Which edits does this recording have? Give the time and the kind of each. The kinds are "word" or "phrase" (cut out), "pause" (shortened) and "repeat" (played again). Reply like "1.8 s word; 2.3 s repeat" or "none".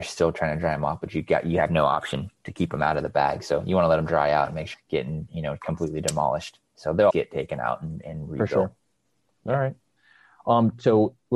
4.7 s word; 7.1 s word